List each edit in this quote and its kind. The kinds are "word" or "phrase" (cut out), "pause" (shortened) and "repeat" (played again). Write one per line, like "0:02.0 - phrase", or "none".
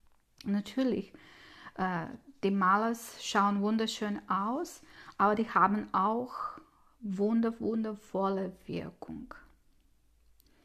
none